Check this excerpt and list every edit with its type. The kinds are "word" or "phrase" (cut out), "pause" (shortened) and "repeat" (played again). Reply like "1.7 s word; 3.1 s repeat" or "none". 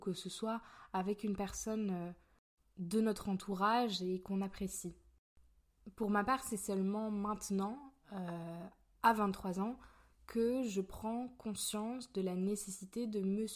none